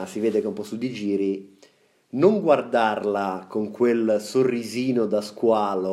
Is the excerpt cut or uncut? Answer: uncut